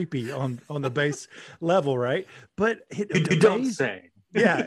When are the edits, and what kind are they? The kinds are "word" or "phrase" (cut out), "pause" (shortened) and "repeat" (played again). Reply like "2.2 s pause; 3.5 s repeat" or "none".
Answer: 3.2 s repeat